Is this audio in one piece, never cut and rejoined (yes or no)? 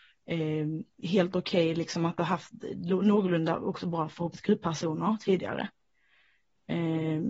no